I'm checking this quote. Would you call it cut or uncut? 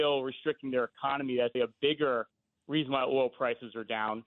cut